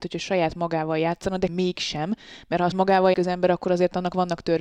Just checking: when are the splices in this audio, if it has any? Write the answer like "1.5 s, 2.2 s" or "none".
1.5 s, 2.7 s, 3.1 s